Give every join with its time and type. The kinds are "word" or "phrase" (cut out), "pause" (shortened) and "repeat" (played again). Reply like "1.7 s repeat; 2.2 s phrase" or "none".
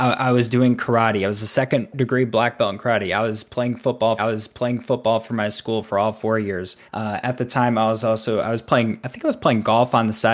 4.2 s repeat; 6.9 s pause